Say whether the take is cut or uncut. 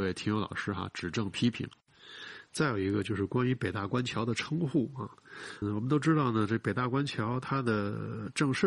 cut